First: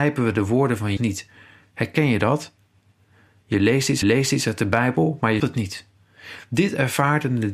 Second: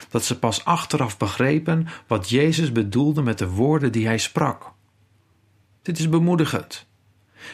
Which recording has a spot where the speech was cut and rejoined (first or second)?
first